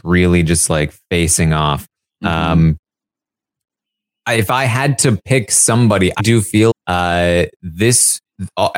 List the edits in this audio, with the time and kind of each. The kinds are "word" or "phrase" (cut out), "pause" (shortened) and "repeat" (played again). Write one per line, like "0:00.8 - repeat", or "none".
0:06.2 - word
0:06.7 - word